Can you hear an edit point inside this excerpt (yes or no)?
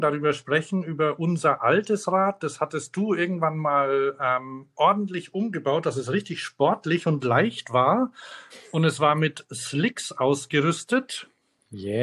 no